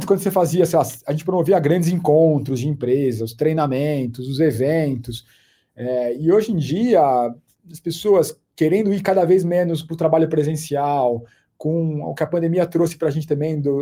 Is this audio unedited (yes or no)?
yes